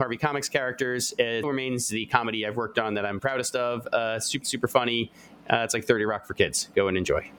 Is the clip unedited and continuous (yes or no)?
no